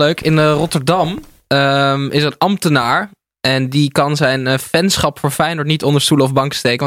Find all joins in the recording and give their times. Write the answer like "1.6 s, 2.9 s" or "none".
none